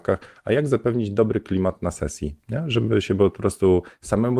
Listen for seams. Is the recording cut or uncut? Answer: uncut